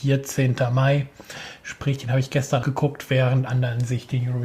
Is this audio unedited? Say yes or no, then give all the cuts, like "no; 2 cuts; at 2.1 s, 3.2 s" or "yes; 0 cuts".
no; 2 cuts; at 2.6 s, 3.5 s